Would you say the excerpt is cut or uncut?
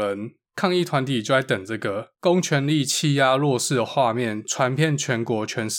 cut